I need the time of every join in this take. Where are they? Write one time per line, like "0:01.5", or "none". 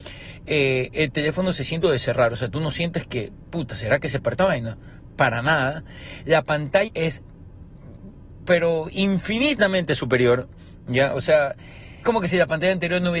0:01.8
0:04.4
0:06.9
0:12.0